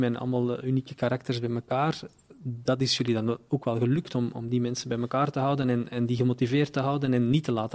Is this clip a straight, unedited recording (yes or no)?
yes